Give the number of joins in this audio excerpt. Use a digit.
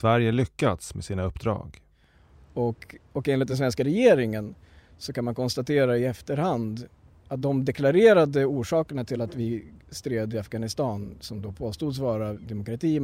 0